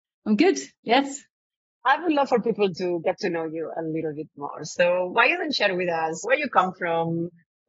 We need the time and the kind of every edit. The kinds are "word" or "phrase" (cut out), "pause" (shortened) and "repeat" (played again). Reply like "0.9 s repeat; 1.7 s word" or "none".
none